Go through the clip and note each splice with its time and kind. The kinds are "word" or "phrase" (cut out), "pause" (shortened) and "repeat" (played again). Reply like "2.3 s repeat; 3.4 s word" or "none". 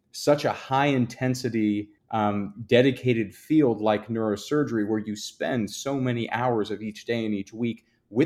2.0 s pause